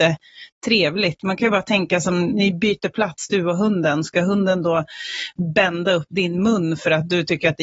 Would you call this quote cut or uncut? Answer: uncut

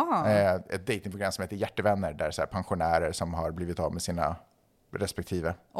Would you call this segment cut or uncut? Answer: uncut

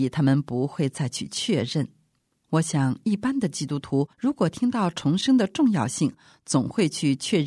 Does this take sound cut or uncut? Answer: cut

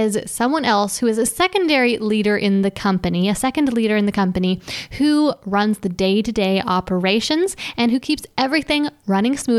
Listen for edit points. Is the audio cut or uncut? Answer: uncut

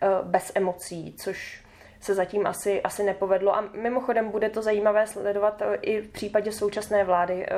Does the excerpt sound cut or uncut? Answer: uncut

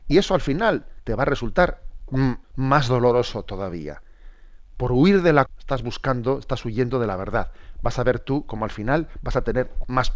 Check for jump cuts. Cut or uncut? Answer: cut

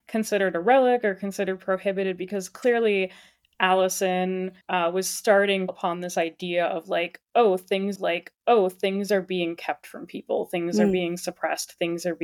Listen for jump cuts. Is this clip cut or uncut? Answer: cut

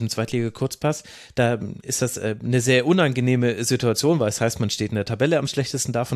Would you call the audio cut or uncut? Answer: uncut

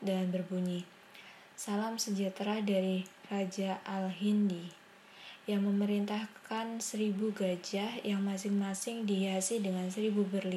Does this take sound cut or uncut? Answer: uncut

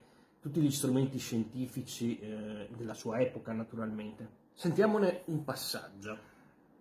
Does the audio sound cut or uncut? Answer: cut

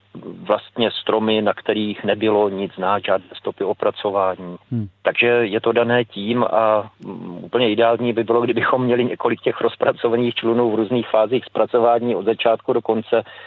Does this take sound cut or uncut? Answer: cut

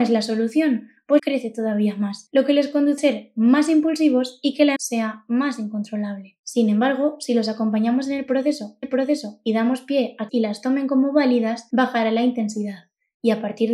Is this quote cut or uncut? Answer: cut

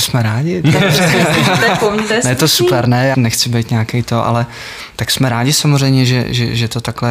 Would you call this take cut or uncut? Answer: cut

